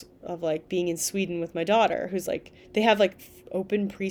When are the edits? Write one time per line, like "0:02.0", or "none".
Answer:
0:02.6